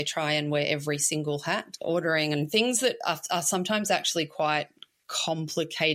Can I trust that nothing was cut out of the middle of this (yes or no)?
yes